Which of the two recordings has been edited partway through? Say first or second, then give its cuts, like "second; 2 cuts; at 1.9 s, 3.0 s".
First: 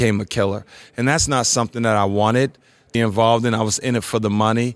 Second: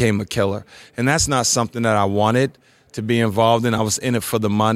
first; 1 cut; at 2.9 s